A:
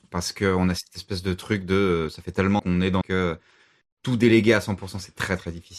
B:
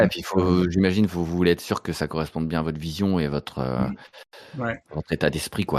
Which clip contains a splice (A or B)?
A